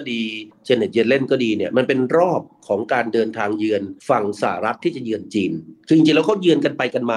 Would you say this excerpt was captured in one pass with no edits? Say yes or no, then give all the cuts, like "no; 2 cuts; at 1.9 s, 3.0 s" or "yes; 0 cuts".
no; 1 cut; at 4.0 s